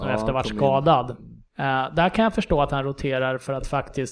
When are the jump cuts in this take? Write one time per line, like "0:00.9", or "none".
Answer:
0:01.5